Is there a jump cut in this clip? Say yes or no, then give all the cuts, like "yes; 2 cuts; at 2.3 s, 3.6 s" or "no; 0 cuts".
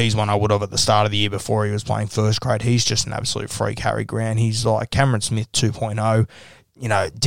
no; 0 cuts